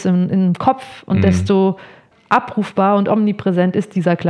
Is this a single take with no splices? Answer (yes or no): no